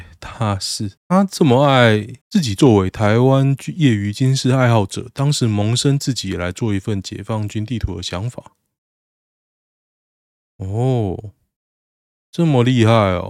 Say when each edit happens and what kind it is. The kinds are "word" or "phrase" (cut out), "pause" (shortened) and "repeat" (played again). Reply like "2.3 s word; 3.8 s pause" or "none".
1.0 s pause; 2.2 s pause